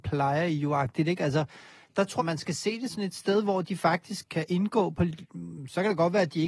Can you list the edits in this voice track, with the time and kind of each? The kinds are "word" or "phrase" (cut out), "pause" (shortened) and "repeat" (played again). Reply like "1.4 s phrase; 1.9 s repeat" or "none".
2.2 s word; 2.9 s word; 4.3 s word